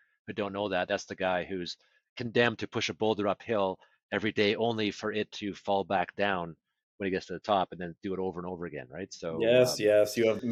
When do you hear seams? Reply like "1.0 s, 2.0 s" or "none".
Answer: none